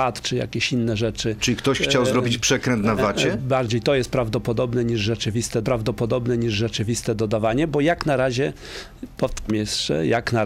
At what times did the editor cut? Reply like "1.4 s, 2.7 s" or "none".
3.4 s, 5.6 s, 9.5 s